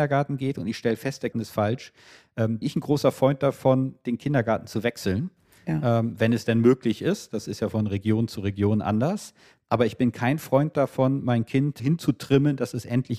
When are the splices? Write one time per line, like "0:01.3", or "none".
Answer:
0:01.3
0:02.6
0:11.8